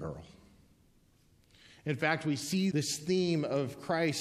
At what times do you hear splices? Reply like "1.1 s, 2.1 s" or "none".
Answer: 2.7 s